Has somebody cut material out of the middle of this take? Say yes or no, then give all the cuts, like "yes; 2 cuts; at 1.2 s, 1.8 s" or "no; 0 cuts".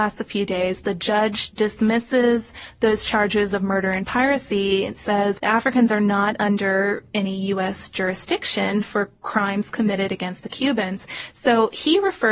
yes; 1 cut; at 5.4 s